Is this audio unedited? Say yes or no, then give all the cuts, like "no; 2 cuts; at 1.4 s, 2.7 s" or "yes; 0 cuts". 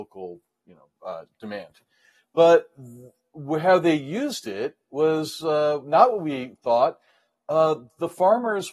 yes; 0 cuts